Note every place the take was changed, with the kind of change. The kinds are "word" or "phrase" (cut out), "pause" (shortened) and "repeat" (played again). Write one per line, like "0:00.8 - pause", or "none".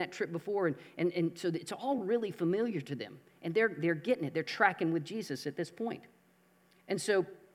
none